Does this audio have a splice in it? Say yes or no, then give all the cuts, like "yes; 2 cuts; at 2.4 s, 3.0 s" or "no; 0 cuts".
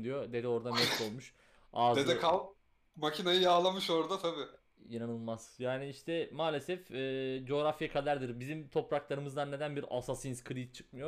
no; 0 cuts